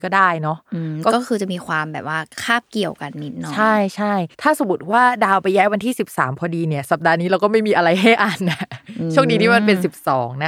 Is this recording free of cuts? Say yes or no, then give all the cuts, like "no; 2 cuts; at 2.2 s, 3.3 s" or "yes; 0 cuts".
no; 1 cut; at 4.3 s